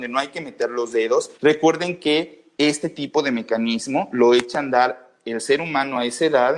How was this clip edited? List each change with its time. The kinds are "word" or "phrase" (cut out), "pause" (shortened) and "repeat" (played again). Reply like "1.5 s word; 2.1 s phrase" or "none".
1.3 s pause